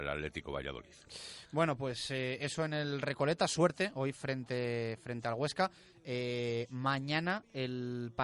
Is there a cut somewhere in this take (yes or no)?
no